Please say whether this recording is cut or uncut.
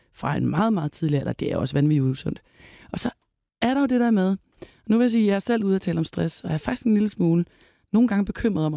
uncut